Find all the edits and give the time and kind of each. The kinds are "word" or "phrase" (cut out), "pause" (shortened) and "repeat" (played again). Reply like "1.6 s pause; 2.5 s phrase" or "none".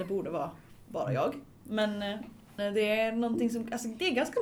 2.6 s word